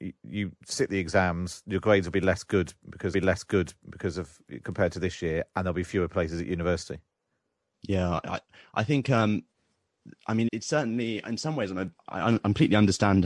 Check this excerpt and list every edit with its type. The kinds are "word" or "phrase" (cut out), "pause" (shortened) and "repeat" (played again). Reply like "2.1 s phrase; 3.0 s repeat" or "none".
3.1 s repeat; 10.5 s word; 12.0 s pause